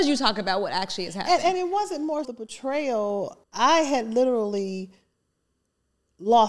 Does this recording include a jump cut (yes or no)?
yes